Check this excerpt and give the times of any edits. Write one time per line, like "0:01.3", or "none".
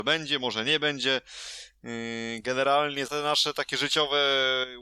0:03.1

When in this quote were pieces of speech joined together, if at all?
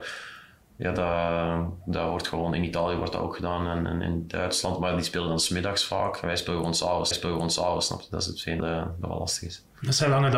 0:07.1
0:08.6

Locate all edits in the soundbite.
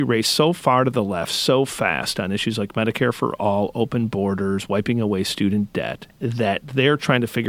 none

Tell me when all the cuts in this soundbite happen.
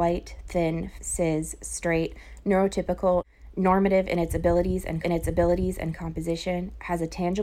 0:01.0
0:05.0

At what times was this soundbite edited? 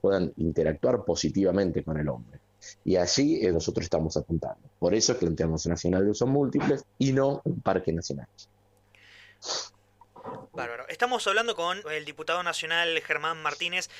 0:03.5
0:05.2
0:05.6
0:06.9
0:10.5
0:11.8

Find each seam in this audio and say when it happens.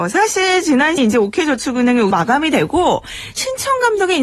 0:01.0
0:02.1

